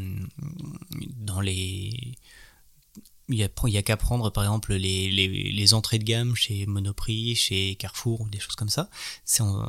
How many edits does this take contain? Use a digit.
0